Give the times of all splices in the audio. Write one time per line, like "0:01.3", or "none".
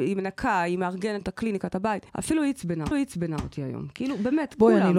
0:01.2
0:02.1
0:02.9